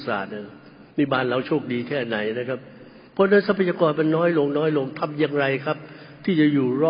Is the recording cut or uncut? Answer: cut